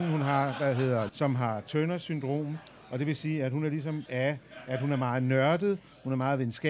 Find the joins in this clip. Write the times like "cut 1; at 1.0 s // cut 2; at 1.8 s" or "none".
cut 1; at 1.1 s // cut 2; at 4.1 s